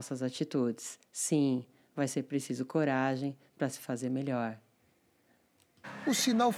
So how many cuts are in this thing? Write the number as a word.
one